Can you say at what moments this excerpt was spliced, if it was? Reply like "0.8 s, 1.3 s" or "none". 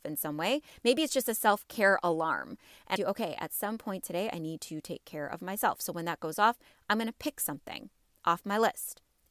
3.0 s